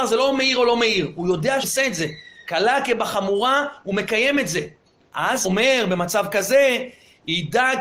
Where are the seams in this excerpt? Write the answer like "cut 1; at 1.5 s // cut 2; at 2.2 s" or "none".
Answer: cut 1; at 1.6 s // cut 2; at 5.4 s